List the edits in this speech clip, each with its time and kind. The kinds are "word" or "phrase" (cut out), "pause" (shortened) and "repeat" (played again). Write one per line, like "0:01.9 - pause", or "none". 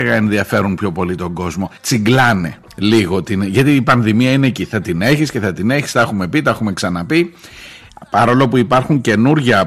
0:01.8 - pause